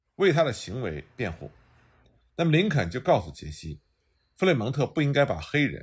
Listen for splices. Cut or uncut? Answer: uncut